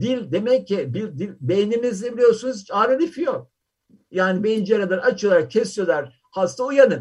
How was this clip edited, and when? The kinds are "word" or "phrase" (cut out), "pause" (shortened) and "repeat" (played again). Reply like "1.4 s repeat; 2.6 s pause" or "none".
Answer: none